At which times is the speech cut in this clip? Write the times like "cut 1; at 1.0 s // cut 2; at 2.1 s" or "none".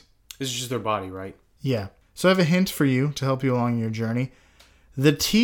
none